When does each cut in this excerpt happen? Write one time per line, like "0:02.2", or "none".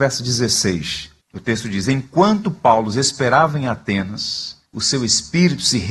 0:01.2
0:04.7

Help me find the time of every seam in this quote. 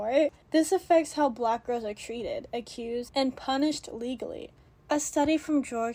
none

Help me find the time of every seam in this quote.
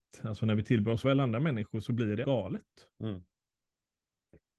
0:01.0
0:02.2

